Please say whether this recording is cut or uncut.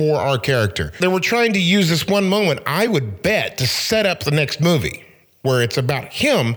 uncut